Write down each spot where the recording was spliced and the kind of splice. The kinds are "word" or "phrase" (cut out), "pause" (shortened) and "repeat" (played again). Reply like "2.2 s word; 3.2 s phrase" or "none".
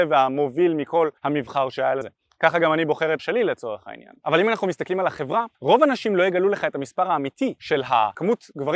1.2 s pause; 2.0 s word; 3.2 s word; 5.5 s pause